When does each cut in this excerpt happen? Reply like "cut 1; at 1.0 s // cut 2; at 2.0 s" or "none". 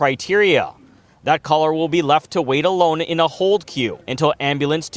cut 1; at 4.0 s

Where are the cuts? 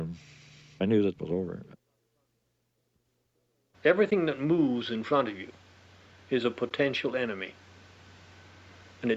cut 1; at 1.2 s

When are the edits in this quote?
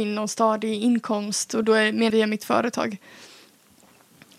cut 1; at 1.6 s // cut 2; at 2.1 s

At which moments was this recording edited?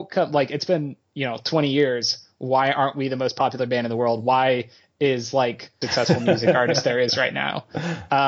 cut 1; at 5.8 s

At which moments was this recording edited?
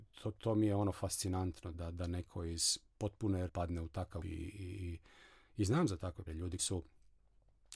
cut 1; at 1.7 s // cut 2; at 3.5 s // cut 3; at 4.2 s // cut 4; at 6.3 s // cut 5; at 6.6 s

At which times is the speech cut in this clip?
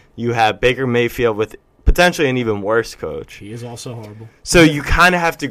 none

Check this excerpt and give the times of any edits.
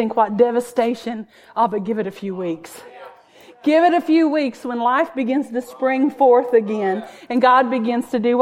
none

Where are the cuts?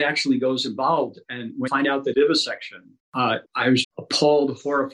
cut 1; at 1.7 s // cut 2; at 2.1 s // cut 3; at 3.4 s // cut 4; at 3.8 s

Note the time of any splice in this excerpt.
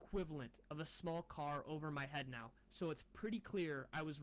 none

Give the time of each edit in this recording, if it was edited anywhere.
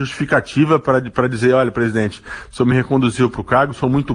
none

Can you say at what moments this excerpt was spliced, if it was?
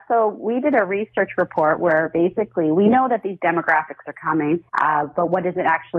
cut 1; at 4.7 s

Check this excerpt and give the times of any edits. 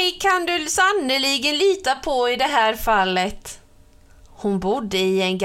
none

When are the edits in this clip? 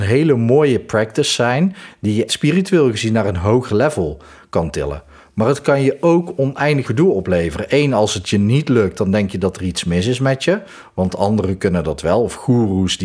cut 1; at 2.3 s // cut 2; at 6.8 s

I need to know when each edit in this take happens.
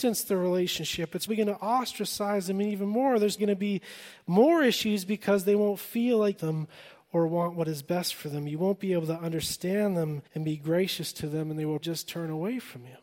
cut 1; at 1.3 s // cut 2; at 3.4 s // cut 3; at 6.4 s // cut 4; at 10.3 s // cut 5; at 11.8 s

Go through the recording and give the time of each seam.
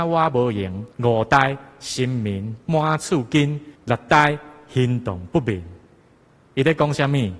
cut 1; at 0.9 s // cut 2; at 3.8 s

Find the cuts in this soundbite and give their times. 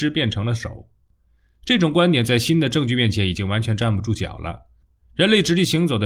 none

